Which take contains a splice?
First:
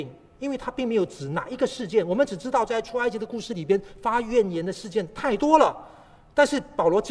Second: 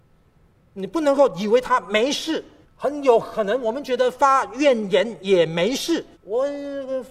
second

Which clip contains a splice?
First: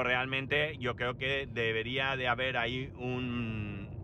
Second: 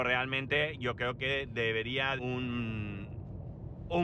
second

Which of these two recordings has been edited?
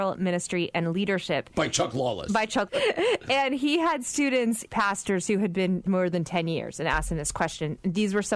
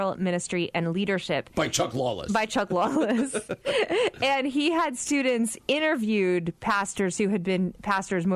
first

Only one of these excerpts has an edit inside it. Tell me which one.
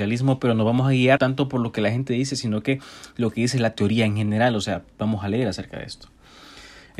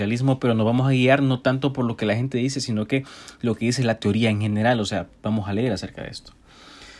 first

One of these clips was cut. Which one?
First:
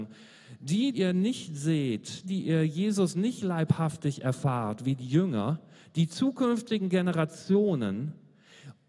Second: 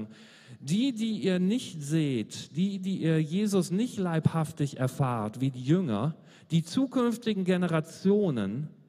first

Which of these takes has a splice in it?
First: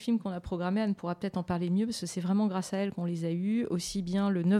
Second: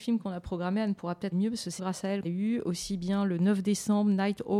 second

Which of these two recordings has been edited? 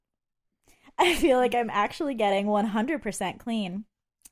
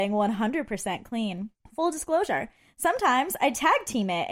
second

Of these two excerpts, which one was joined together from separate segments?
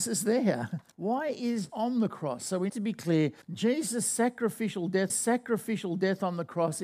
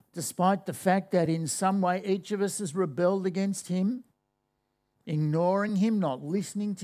first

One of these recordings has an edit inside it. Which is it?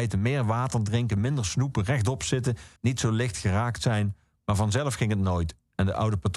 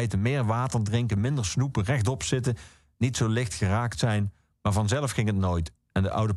first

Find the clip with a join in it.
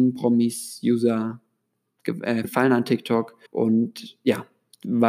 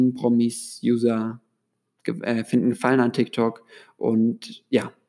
first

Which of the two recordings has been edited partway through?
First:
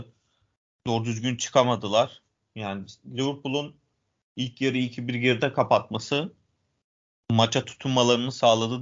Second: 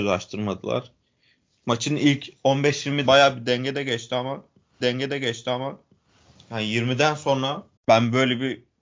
second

